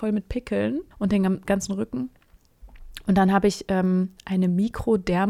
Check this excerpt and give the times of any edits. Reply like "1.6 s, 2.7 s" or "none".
0.9 s